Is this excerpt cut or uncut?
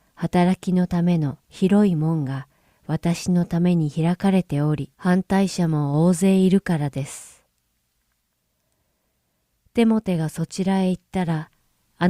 cut